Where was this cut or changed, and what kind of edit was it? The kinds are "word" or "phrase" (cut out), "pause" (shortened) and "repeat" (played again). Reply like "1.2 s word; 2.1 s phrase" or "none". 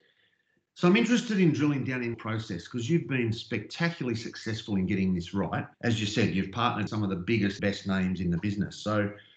2.1 s word; 5.7 s pause; 6.9 s word; 7.6 s word